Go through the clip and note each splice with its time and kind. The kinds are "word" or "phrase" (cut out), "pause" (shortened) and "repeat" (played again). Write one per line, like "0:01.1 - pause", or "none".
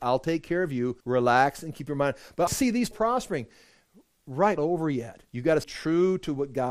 0:01.0 - pause
0:02.5 - word
0:02.9 - word
0:04.6 - phrase
0:05.3 - pause
0:05.6 - word